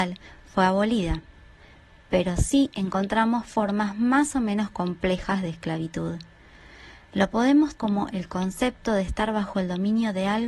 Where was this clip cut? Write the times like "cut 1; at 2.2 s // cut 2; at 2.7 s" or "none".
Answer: cut 1; at 7.8 s